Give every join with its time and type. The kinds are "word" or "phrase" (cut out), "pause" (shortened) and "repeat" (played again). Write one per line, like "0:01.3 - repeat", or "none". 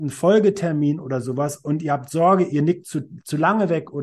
none